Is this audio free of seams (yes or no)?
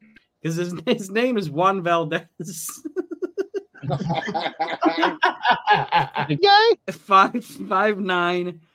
no